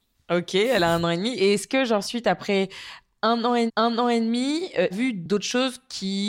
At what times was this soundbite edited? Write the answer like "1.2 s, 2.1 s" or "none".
3.7 s, 4.9 s